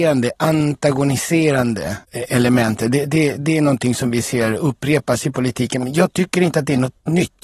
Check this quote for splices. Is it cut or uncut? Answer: cut